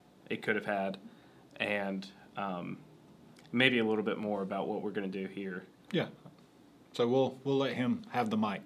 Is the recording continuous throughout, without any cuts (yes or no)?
yes